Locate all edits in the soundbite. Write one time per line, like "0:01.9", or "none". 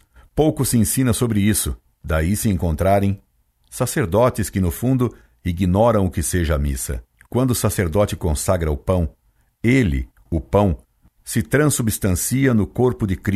0:07.1